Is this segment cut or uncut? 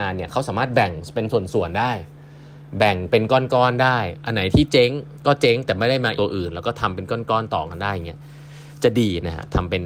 cut